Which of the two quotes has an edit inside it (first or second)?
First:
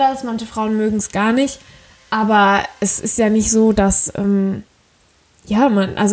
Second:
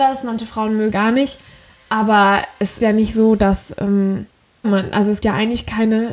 second